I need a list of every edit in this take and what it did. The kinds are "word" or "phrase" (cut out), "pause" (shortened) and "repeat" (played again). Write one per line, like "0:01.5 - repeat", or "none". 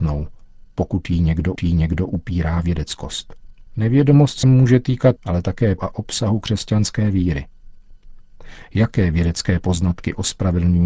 0:01.6 - repeat
0:03.7 - pause
0:04.4 - word
0:05.2 - phrase
0:05.8 - word